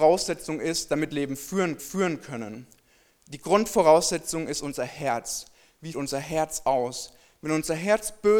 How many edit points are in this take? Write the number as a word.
three